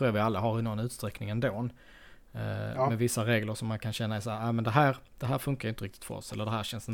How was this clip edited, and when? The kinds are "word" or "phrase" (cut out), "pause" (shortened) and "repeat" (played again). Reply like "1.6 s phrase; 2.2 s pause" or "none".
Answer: none

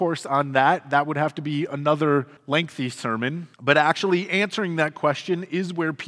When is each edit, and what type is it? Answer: 2.4 s pause; 3.5 s pause

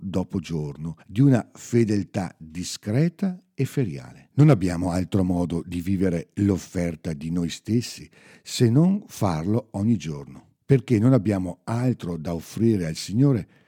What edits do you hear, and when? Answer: 1.0 s pause; 4.3 s pause; 10.6 s pause

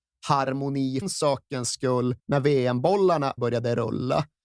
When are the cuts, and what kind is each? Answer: 1.0 s phrase; 2.2 s pause; 3.4 s word

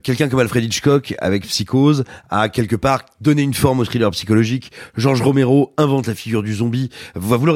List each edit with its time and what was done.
none

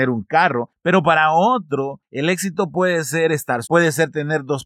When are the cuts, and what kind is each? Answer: 3.6 s word

